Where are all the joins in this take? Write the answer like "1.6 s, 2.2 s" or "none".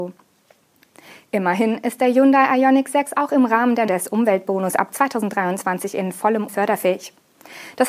3.9 s, 6.5 s